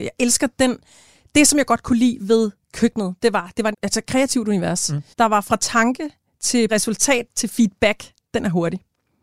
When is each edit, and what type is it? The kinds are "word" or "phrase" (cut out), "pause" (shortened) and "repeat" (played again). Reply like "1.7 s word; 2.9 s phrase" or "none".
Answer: 3.7 s phrase; 5.1 s pause; 6.7 s phrase